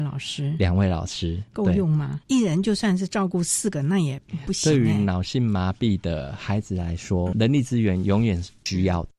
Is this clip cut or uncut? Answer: cut